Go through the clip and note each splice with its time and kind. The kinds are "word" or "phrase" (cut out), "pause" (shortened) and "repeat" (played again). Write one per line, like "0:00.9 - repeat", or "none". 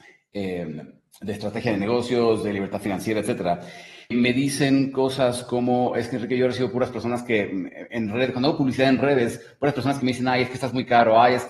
0:04.1 - word